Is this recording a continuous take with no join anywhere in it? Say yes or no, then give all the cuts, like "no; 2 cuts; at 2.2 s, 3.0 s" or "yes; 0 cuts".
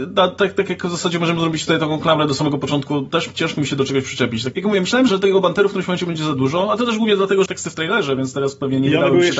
no; 3 cuts; at 4.5 s, 5.1 s, 7.5 s